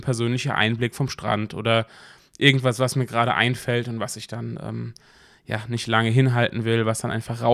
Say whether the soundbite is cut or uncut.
uncut